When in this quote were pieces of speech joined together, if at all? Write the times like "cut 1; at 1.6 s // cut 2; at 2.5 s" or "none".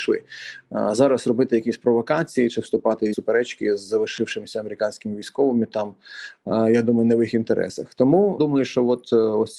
cut 1; at 3.1 s

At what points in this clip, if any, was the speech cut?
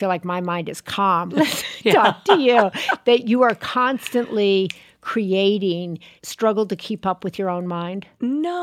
cut 1; at 1.3 s // cut 2; at 6.2 s

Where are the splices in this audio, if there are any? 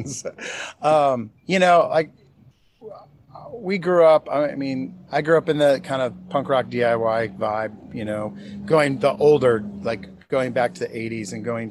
cut 1; at 1.4 s // cut 2; at 5.1 s

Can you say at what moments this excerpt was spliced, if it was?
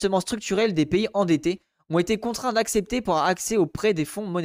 none

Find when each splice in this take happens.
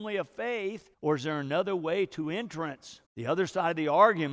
cut 1; at 0.9 s // cut 2; at 3.0 s

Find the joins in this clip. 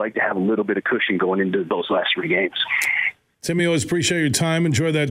none

